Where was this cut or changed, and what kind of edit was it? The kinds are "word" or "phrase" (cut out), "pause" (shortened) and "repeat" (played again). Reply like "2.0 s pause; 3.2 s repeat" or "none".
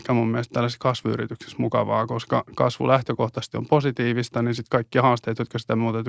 none